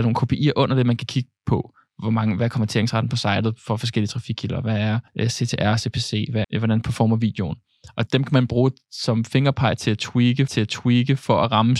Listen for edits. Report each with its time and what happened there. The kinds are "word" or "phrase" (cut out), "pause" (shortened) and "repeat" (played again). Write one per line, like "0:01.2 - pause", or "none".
0:05.1 - pause
0:06.4 - word
0:08.1 - word
0:10.5 - repeat